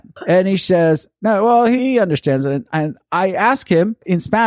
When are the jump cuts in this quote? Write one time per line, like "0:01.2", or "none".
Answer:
0:01.8